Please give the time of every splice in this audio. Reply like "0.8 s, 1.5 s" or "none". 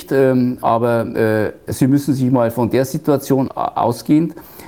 3.5 s